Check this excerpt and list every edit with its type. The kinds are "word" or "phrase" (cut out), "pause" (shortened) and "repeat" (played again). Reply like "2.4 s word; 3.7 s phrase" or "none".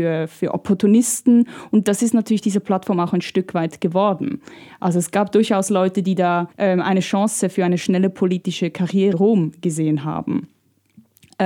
6.5 s pause; 9.1 s word